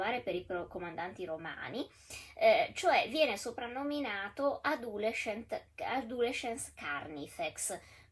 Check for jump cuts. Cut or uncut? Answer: uncut